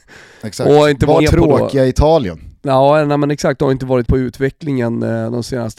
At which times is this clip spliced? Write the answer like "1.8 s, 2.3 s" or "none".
1.2 s, 4.1 s